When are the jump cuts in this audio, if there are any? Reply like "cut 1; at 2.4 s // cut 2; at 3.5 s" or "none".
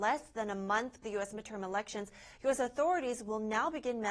cut 1; at 1.0 s

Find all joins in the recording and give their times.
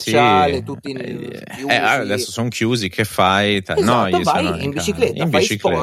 none

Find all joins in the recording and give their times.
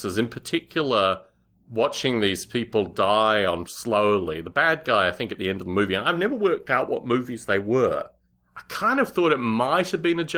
cut 1; at 3.7 s

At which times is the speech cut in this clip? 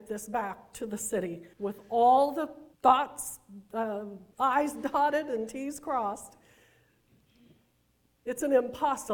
cut 1; at 1.5 s // cut 2; at 2.7 s // cut 3; at 4.3 s

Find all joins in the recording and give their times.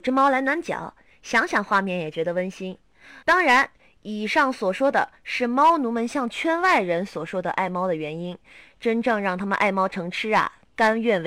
cut 1; at 3.2 s

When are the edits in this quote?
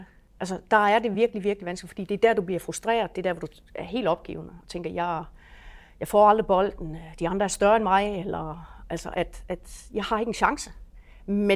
none

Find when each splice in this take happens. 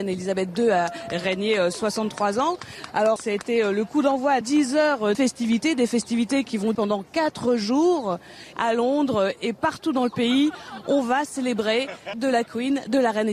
cut 1; at 3.2 s // cut 2; at 4.4 s // cut 3; at 5.1 s // cut 4; at 6.7 s // cut 5; at 8.5 s // cut 6; at 12.1 s

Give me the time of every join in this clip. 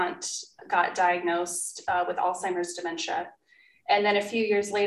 none

